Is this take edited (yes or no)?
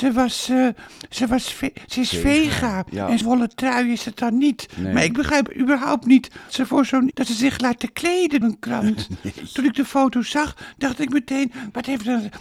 yes